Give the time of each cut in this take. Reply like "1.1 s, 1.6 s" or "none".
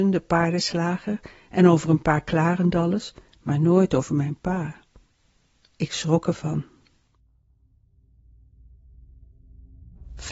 none